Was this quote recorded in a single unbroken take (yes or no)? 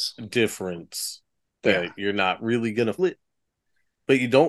no